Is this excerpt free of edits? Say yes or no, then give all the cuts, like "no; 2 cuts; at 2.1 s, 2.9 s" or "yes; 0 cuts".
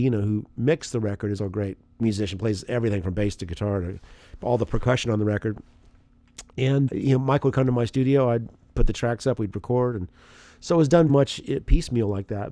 no; 4 cuts; at 1.4 s, 2.0 s, 6.9 s, 11.1 s